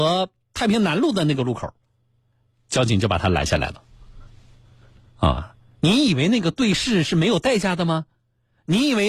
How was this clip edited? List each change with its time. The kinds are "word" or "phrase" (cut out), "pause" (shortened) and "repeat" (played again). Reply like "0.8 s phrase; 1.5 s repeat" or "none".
none